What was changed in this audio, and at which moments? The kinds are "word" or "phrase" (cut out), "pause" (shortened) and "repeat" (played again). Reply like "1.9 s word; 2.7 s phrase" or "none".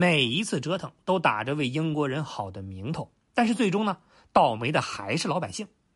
none